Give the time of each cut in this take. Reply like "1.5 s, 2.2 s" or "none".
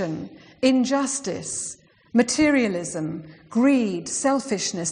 none

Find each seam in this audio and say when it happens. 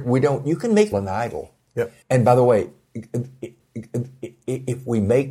0.9 s, 2.0 s, 3.6 s

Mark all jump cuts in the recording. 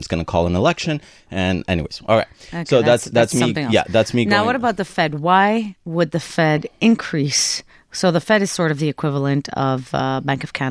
none

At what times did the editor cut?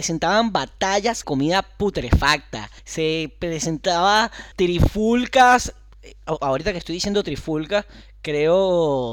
1.2 s, 2.8 s, 4.5 s

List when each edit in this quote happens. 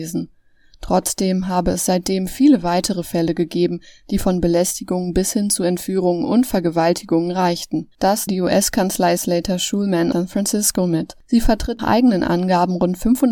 8.3 s, 9.2 s, 10.1 s, 11.8 s

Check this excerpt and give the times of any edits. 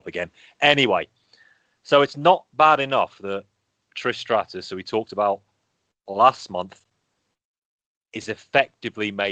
none

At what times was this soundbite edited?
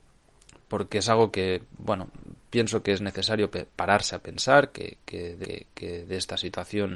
5.4 s

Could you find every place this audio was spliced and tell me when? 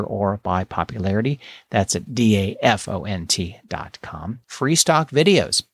2.1 s, 4.4 s

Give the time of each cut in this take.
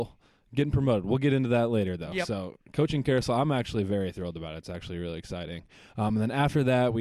none

